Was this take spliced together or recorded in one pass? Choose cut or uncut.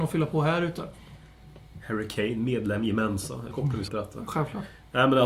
cut